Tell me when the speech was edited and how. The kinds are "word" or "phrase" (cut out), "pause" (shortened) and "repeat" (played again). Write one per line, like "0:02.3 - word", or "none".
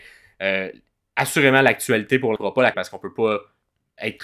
0:02.4 - phrase
0:02.7 - word